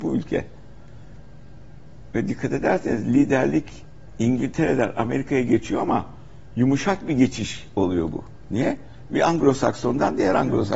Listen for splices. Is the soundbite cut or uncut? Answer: uncut